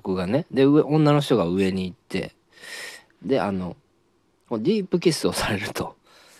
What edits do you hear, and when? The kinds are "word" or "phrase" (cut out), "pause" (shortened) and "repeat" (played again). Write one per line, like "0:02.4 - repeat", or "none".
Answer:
none